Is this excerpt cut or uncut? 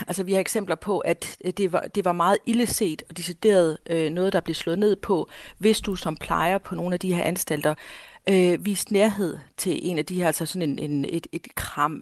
uncut